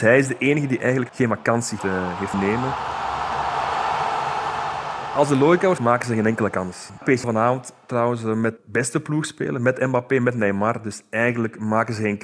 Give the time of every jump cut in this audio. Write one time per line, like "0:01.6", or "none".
0:01.1
0:01.8
0:02.3
0:05.8
0:07.2
0:08.6